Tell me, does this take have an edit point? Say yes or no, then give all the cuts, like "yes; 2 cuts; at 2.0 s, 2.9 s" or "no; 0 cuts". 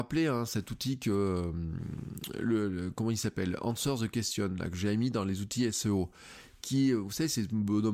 no; 0 cuts